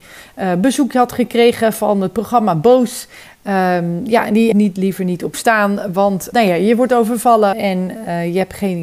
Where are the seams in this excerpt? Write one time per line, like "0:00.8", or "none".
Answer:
0:04.5
0:05.3
0:06.3
0:07.5